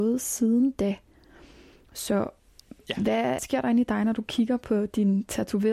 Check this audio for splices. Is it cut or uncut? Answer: cut